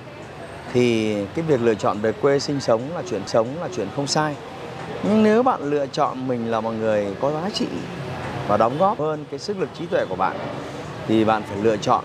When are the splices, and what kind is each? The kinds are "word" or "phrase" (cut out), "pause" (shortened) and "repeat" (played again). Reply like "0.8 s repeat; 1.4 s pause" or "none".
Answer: 3.3 s repeat; 9.0 s word